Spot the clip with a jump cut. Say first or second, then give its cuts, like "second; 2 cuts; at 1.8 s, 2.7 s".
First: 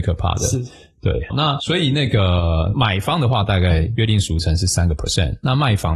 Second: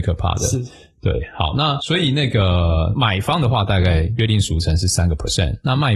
first; 1 cut; at 1.3 s